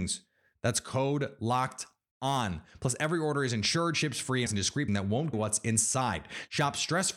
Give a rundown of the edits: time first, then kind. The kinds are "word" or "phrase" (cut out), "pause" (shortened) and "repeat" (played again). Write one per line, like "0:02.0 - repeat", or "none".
0:04.5 - word
0:04.9 - word
0:05.3 - phrase